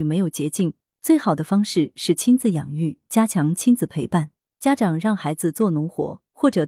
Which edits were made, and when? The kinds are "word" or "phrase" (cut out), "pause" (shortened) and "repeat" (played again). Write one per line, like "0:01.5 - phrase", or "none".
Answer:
none